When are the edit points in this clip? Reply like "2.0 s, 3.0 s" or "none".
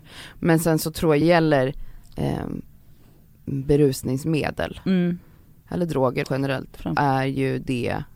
1.2 s, 6.2 s, 7.0 s